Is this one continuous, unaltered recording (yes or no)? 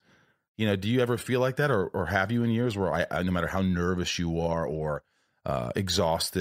yes